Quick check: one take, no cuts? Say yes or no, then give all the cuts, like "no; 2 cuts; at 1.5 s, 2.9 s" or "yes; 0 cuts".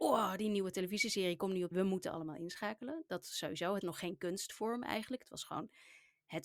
no; 2 cuts; at 1.7 s, 3.8 s